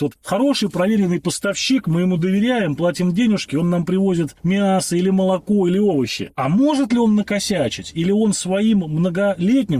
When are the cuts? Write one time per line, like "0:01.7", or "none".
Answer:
none